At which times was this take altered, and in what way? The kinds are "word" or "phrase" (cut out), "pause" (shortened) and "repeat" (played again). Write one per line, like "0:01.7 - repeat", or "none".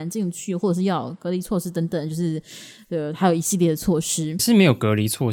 0:04.4 - phrase